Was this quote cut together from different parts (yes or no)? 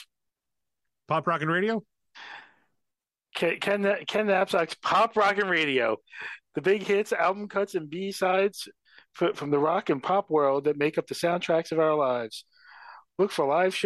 no